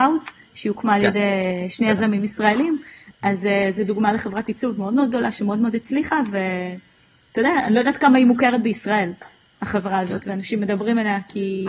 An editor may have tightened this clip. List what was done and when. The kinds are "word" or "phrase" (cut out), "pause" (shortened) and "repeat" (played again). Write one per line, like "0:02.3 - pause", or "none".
none